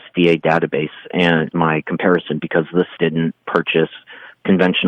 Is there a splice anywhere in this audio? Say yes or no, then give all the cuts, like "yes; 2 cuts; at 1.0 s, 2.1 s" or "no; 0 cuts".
yes; 4 cuts; at 1.5 s, 2.4 s, 3.0 s, 3.4 s